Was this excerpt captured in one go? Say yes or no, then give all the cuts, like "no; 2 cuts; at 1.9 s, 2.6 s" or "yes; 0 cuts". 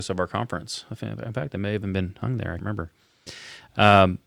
no; 1 cut; at 2.6 s